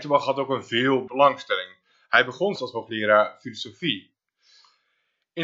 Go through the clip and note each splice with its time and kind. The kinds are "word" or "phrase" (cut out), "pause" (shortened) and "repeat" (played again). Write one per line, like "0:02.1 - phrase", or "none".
0:01.1 - word
0:02.6 - word